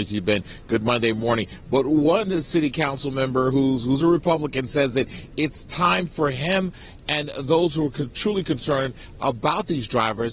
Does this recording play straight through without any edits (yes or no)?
yes